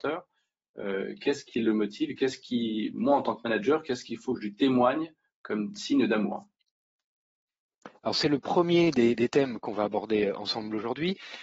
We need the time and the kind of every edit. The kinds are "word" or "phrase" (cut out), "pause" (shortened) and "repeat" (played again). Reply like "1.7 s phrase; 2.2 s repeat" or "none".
none